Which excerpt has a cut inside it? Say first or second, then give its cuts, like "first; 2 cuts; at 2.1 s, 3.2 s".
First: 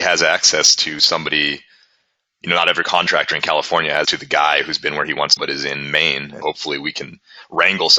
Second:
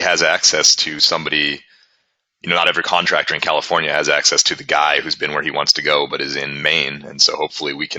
first; 3 cuts; at 4.0 s, 5.4 s, 6.4 s